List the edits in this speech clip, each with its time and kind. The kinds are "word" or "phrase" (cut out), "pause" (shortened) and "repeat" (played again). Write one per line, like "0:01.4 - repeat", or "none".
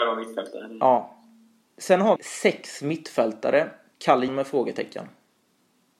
0:02.2 - word
0:03.9 - word
0:04.3 - word